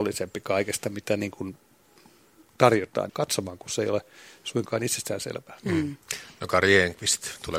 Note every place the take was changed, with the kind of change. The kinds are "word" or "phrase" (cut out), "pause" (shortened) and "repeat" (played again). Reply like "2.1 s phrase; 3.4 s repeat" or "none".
3.1 s phrase

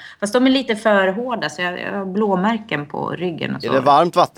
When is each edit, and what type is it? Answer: none

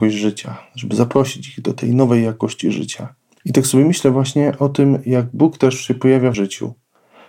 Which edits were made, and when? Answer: 3.3 s pause; 6.3 s word

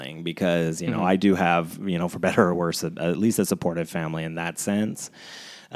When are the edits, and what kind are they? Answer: none

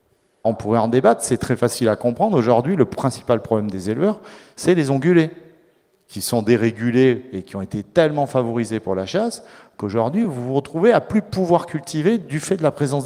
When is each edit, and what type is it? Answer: none

